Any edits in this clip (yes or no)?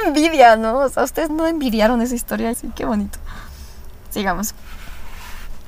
yes